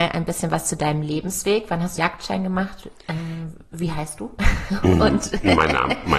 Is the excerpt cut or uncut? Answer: cut